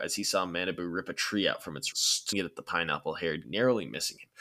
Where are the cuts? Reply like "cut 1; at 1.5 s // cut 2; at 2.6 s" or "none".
cut 1; at 1.9 s // cut 2; at 2.3 s // cut 3; at 3.4 s

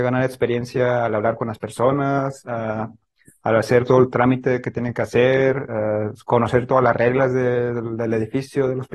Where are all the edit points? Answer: none

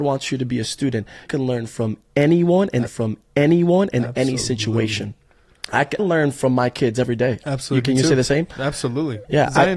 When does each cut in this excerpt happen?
cut 1; at 1.3 s // cut 2; at 2.9 s // cut 3; at 6.0 s

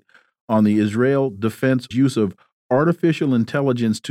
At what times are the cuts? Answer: cut 1; at 1.9 s

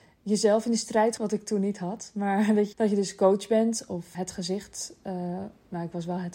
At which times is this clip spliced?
cut 1; at 1.2 s // cut 2; at 2.7 s // cut 3; at 4.1 s

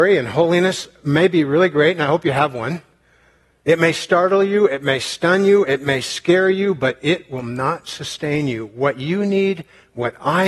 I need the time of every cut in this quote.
none

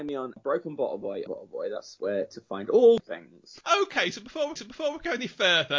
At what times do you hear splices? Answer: cut 1; at 1.3 s // cut 2; at 3.0 s // cut 3; at 4.6 s

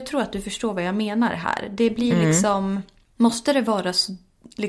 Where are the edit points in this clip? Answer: none

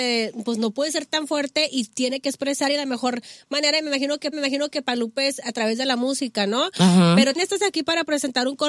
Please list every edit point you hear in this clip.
cut 1; at 4.3 s // cut 2; at 7.4 s

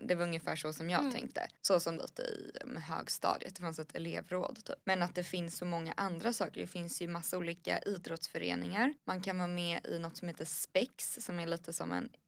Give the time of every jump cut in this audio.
cut 1; at 1.6 s // cut 2; at 2.0 s // cut 3; at 4.8 s // cut 4; at 9.0 s

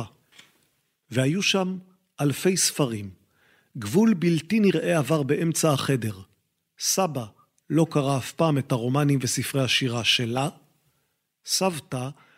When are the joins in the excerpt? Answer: none

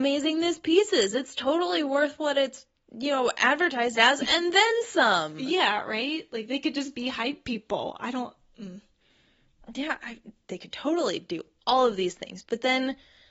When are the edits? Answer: none

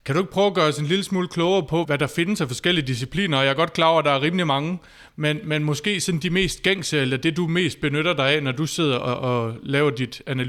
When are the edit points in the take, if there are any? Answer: cut 1; at 1.8 s

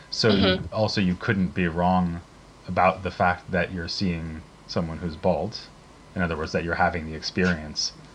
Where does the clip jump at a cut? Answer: none

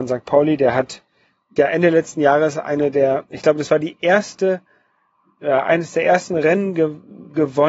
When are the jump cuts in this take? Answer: cut 1; at 1.6 s

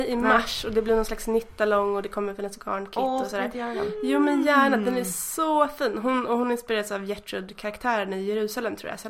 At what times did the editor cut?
none

